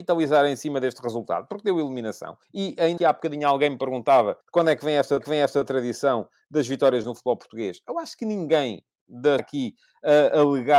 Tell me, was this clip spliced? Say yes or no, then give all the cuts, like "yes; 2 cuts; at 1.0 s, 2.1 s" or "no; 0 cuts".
yes; 6 cuts; at 2.4 s, 3.0 s, 4.4 s, 5.2 s, 7.0 s, 9.4 s